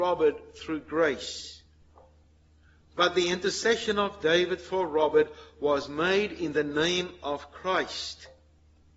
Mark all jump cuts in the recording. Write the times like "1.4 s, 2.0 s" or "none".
none